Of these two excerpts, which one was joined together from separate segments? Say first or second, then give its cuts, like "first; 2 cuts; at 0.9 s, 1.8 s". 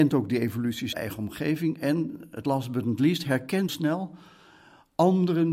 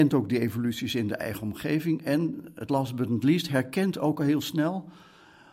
first; 2 cuts; at 0.9 s, 3.7 s